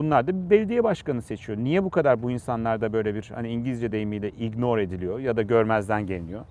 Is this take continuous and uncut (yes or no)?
yes